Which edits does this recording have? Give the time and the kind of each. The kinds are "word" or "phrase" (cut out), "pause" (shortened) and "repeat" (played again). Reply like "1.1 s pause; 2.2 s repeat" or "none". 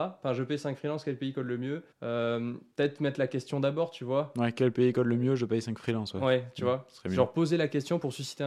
1.9 s pause